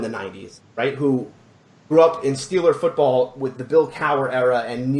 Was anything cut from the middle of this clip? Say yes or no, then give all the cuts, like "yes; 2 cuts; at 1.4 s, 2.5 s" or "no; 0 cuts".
no; 0 cuts